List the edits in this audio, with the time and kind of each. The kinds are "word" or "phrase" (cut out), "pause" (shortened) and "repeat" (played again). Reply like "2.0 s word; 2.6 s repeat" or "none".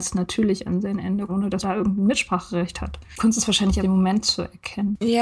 1.3 s phrase; 1.6 s word; 3.8 s word

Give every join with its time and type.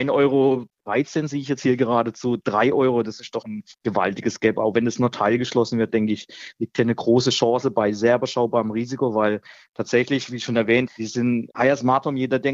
3.4 s word; 10.9 s word

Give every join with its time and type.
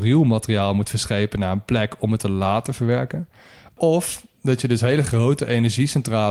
none

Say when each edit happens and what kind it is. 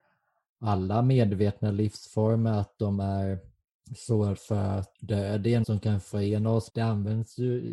4.4 s word; 5.6 s word; 6.7 s word

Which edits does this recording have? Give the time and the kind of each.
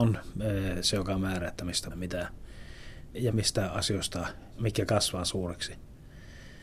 1.9 s word; 3.3 s word; 4.6 s word

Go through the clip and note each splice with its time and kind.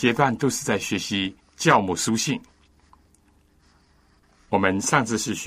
1.4 s pause

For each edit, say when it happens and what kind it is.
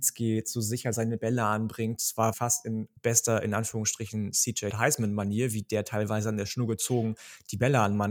2.3 s word; 3.0 s pause; 4.7 s word

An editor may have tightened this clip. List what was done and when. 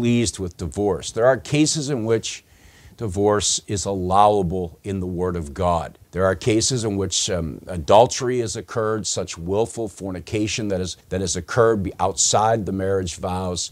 6.0 s pause; 11.0 s pause

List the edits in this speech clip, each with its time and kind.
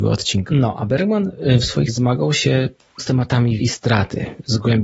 1.9 s word; 3.0 s word; 3.6 s word

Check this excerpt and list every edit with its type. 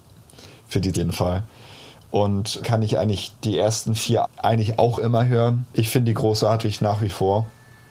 0.9 s phrase; 2.6 s word; 4.2 s word; 5.7 s pause

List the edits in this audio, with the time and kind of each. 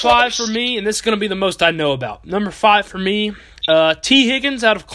none

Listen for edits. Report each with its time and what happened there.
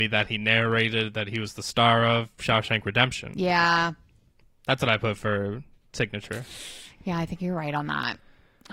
none

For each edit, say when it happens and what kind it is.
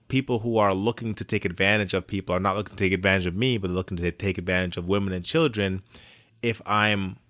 none

